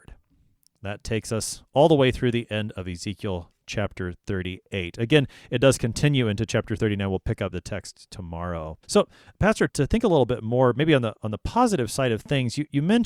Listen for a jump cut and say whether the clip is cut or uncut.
cut